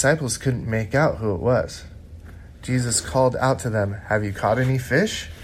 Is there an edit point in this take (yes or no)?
no